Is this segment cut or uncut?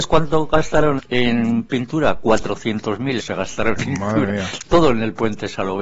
cut